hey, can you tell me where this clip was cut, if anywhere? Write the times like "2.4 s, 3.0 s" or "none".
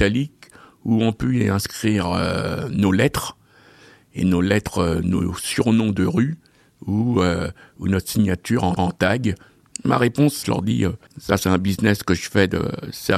8.8 s, 10.4 s, 11.1 s